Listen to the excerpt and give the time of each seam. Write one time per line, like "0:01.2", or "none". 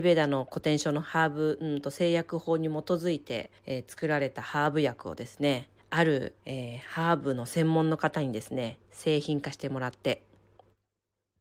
0:03.6
0:05.8
0:06.4
0:08.8